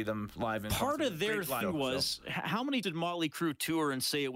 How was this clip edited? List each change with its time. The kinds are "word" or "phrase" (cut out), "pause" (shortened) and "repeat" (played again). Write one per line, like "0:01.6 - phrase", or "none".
0:01.6 - word
0:02.8 - word